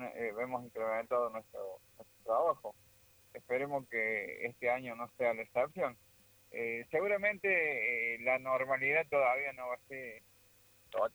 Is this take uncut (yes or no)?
yes